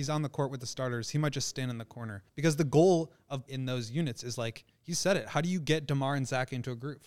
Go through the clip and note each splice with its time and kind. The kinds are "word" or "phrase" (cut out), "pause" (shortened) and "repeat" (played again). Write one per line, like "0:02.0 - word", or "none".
0:02.3 - pause
0:03.5 - word